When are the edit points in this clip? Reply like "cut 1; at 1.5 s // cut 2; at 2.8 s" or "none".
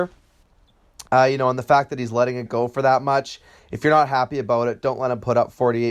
cut 1; at 1.1 s // cut 2; at 2.5 s